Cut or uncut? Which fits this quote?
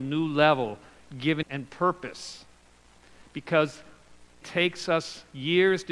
cut